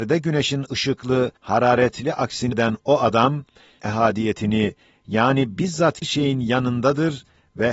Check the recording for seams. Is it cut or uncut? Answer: cut